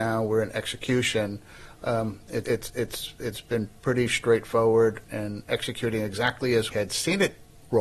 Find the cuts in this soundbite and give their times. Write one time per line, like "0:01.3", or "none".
0:02.4
0:05.0
0:06.7